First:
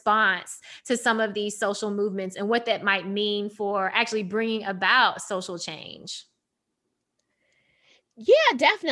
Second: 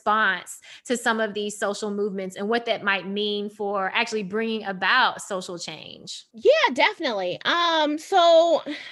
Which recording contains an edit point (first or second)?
second